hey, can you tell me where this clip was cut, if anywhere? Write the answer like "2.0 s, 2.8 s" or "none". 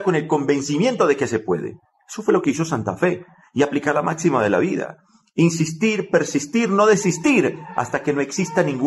none